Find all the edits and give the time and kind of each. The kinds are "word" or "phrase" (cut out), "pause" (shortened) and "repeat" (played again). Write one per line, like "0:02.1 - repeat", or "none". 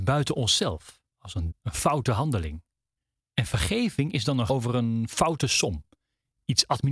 0:01.1 - pause
0:01.5 - word
0:03.0 - pause
0:04.5 - word